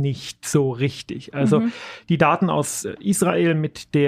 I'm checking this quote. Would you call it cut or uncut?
uncut